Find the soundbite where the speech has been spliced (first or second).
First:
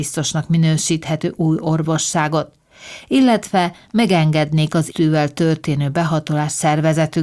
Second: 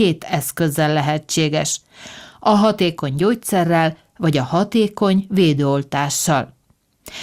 first